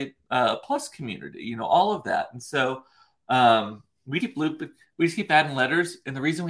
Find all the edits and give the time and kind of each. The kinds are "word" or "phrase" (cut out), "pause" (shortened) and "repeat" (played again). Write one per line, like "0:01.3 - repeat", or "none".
0:04.2 - word